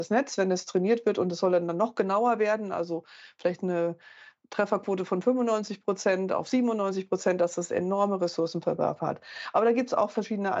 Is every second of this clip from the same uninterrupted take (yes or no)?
yes